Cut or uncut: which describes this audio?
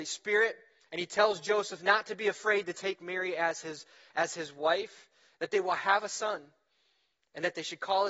uncut